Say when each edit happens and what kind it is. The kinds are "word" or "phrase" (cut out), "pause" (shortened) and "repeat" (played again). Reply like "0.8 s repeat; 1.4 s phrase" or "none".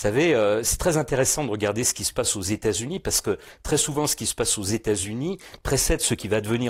none